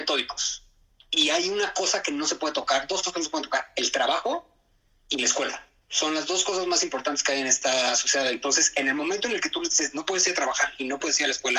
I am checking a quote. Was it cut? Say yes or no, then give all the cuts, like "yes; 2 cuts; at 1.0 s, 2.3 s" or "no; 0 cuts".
no; 0 cuts